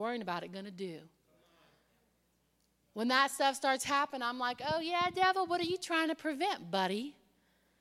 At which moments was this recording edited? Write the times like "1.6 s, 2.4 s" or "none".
none